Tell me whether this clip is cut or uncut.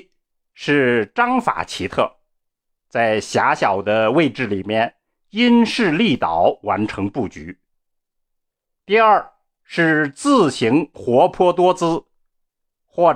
uncut